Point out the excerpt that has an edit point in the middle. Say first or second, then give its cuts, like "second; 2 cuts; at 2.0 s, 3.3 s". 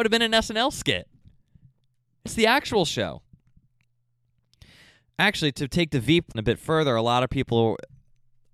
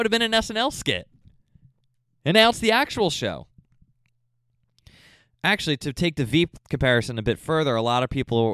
first; 2 cuts; at 2.3 s, 6.3 s